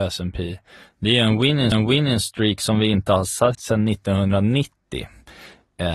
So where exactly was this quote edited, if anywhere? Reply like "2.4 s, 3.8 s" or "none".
1.7 s, 3.5 s